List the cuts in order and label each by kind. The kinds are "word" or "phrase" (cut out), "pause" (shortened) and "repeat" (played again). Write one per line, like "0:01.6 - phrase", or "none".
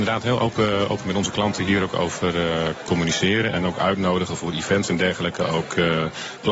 none

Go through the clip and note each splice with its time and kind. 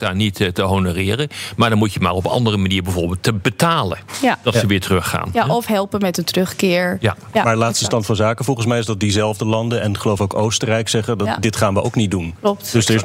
none

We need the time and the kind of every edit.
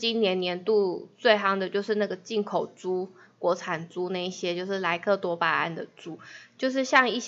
none

